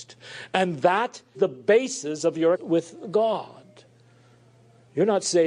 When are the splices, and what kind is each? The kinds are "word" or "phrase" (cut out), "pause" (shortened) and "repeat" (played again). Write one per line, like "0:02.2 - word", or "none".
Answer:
0:01.3 - word
0:02.5 - word